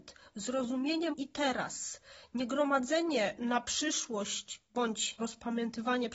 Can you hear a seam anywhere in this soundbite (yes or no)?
yes